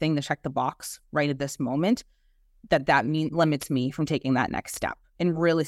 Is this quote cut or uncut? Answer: uncut